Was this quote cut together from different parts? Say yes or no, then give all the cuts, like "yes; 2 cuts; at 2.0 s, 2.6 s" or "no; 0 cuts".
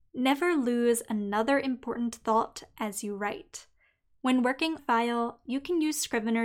yes; 1 cut; at 4.8 s